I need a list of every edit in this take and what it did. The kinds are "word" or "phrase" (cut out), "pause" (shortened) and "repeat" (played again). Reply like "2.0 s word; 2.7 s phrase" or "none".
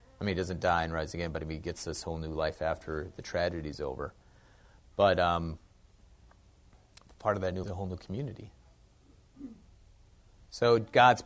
7.6 s phrase